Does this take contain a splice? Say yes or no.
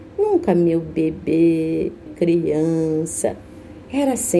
yes